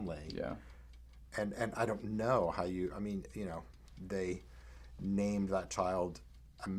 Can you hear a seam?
no; 0 cuts

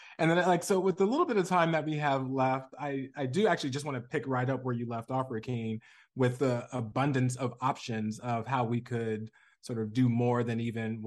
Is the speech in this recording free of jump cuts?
yes; 0 cuts

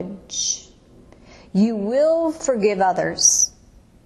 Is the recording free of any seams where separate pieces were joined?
yes; 0 cuts

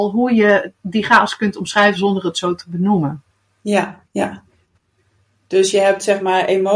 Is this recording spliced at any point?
yes; 1 cut; at 4.1 s

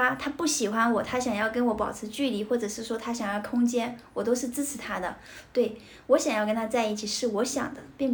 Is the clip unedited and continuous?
yes; 0 cuts

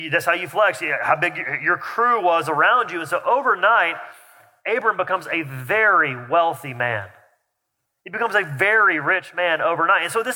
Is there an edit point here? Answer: no; 0 cuts

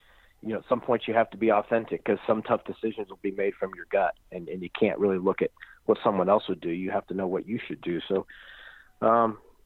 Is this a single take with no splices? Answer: yes; 0 cuts

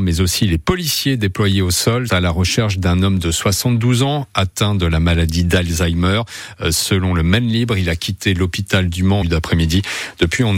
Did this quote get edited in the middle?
yes; 2 cuts; at 2.1 s, 9.2 s

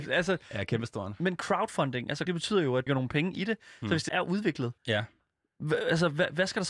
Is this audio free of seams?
no; 4 cuts; at 2.3 s, 2.9 s, 4.1 s, 4.8 s

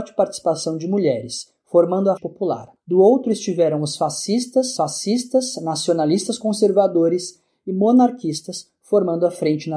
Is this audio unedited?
no; 2 cuts; at 2.2 s, 4.8 s

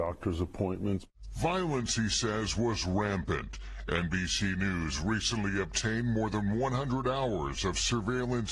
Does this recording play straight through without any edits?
yes; 0 cuts

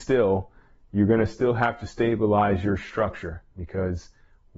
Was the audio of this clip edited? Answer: no; 0 cuts

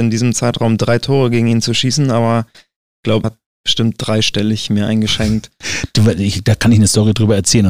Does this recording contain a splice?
yes; 1 cut; at 3.2 s

